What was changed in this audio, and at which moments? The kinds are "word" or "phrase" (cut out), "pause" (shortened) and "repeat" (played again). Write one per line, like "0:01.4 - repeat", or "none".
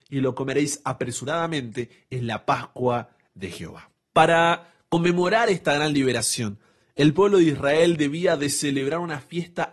0:04.0 - pause